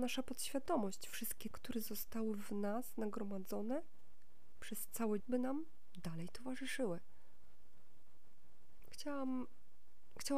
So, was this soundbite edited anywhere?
yes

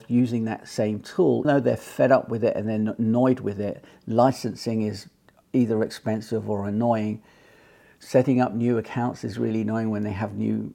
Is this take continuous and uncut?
no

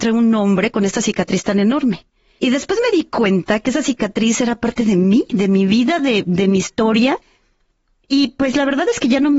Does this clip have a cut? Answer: no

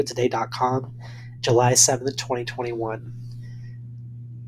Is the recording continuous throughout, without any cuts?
yes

